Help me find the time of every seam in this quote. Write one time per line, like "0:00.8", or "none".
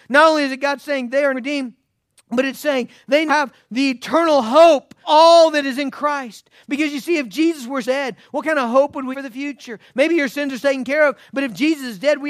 0:01.3
0:03.3
0:05.0
0:07.8
0:09.1
0:10.6